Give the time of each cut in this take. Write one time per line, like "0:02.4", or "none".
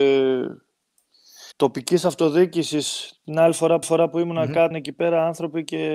0:01.5
0:03.8
0:04.7